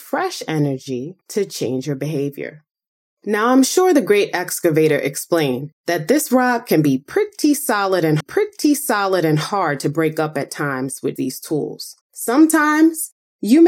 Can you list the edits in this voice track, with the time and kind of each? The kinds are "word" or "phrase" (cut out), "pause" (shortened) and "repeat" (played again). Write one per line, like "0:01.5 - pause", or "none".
0:01.2 - pause
0:03.0 - pause
0:05.8 - pause
0:08.2 - repeat
0:11.2 - word
0:12.0 - pause